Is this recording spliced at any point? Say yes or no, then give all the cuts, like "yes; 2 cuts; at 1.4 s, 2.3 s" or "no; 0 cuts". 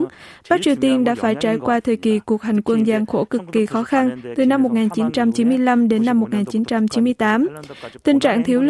no; 0 cuts